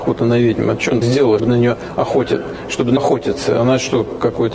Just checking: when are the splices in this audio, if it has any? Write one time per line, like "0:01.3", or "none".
0:01.0
0:01.4
0:03.0